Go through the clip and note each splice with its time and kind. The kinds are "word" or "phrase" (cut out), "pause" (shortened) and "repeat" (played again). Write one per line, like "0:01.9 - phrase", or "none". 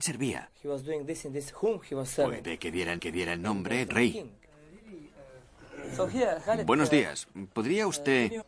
0:03.0 - repeat
0:03.9 - word